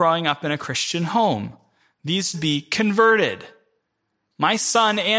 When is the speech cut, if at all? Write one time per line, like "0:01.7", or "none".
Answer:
0:02.3